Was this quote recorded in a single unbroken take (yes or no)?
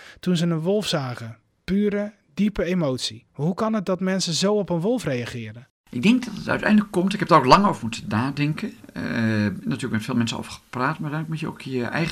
no